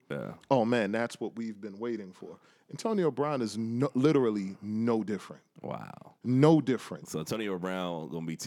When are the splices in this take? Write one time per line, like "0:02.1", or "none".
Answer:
none